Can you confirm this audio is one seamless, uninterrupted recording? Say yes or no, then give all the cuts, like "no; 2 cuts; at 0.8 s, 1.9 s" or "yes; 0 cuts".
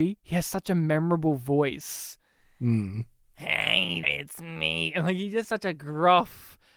no; 2 cuts; at 4.0 s, 5.4 s